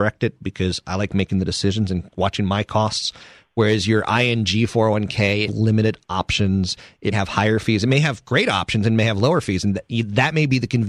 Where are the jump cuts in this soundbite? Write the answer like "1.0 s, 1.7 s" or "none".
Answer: 5.5 s, 7.1 s